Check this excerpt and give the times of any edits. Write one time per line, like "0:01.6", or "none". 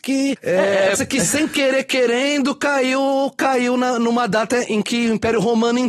0:00.9